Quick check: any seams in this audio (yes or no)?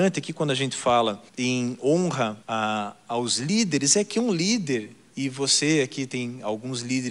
yes